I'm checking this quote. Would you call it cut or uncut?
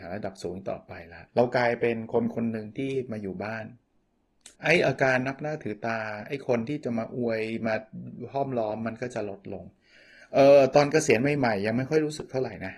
cut